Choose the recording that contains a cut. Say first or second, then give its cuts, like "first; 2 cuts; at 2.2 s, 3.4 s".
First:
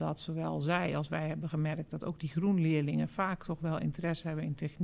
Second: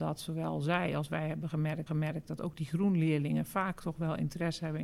second; 1 cut; at 1.9 s